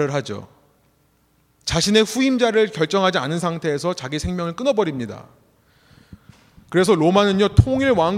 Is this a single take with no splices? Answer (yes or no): yes